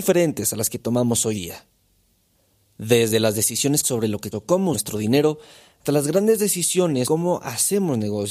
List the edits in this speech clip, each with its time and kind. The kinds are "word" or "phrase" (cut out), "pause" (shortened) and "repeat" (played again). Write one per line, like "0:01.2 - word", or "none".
0:01.3 - word
0:03.8 - word
0:04.3 - word
0:04.7 - word
0:05.8 - word
0:07.0 - word